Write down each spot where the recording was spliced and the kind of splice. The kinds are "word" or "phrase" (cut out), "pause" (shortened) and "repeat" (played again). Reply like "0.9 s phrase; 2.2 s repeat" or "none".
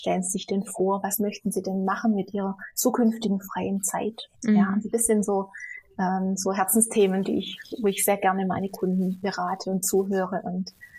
4.3 s pause